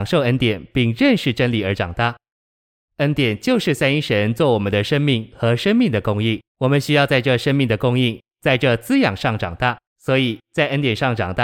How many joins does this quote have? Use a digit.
2